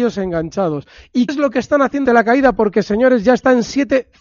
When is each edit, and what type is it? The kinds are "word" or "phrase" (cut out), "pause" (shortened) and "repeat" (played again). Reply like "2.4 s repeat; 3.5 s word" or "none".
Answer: 1.3 s word; 2.1 s word